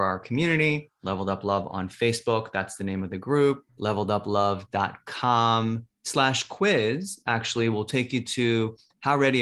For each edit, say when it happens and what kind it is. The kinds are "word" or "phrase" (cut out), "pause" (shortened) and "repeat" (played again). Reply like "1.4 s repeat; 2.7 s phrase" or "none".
3.7 s pause; 5.9 s pause